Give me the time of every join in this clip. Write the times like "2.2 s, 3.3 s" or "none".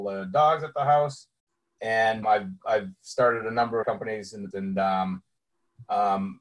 2.2 s, 3.8 s, 4.5 s